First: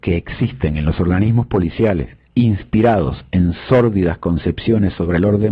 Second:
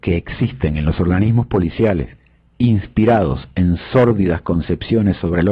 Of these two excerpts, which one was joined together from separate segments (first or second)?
first